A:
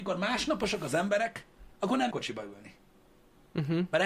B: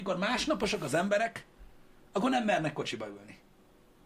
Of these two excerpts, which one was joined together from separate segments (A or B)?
A